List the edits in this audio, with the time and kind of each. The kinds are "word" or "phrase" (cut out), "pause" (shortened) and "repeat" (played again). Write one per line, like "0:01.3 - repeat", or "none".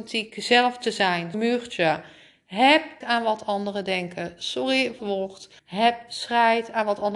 0:01.3 - word
0:03.0 - word
0:05.0 - phrase
0:05.6 - pause